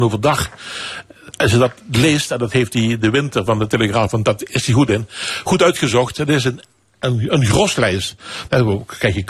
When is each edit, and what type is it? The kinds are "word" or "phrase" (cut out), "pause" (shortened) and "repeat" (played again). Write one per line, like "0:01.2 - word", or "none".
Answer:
none